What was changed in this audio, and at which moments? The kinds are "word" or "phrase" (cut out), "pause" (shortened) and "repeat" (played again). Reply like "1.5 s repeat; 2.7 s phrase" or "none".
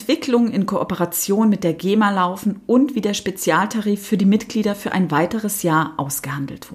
none